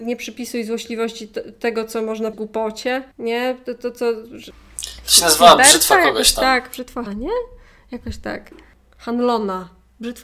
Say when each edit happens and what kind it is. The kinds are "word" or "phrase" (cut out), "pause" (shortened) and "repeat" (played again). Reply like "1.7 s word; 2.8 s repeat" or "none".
2.3 s word; 3.1 s pause; 7.1 s phrase